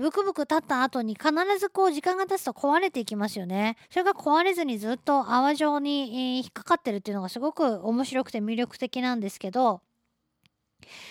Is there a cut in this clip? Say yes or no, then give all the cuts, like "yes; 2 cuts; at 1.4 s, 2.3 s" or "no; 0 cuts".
yes; 1 cut; at 3.8 s